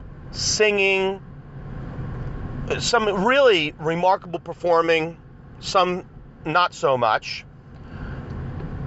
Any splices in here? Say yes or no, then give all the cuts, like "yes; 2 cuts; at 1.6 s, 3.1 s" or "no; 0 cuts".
no; 0 cuts